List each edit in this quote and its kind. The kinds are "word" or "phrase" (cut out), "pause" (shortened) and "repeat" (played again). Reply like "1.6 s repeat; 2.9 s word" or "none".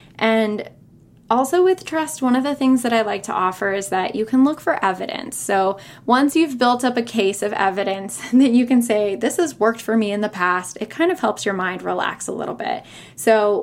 none